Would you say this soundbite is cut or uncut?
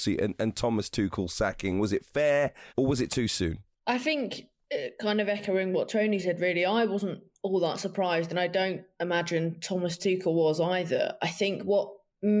cut